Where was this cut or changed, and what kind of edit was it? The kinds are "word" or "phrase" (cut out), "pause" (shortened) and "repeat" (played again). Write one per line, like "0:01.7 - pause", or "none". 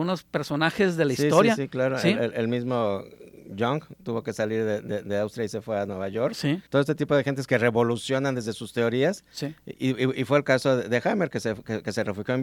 0:06.7 - pause